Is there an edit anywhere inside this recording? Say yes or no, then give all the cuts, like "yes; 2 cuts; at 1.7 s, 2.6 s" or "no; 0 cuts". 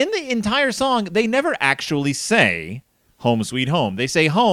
no; 0 cuts